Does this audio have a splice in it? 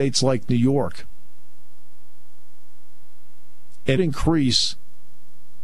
yes; 1 cut; at 4.0 s

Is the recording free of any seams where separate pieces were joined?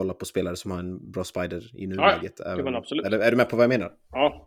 yes; 0 cuts

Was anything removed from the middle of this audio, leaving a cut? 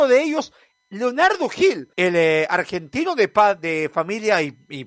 yes; 1 cut; at 1.9 s

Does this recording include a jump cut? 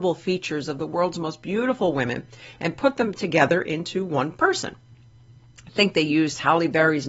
no; 0 cuts

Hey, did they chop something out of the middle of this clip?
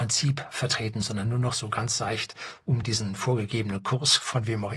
no; 0 cuts

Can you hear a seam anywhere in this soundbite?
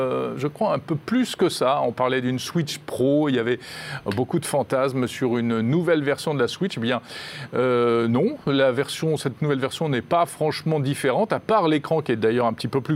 no; 0 cuts

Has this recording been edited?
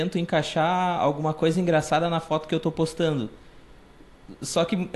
no; 0 cuts

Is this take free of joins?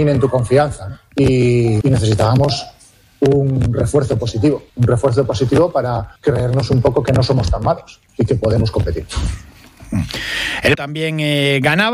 no; 5 cuts; at 1.8 s, 4.7 s, 6.2 s, 8.1 s, 10.7 s

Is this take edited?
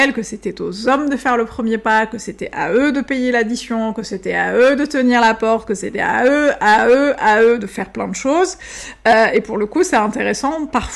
no; 0 cuts

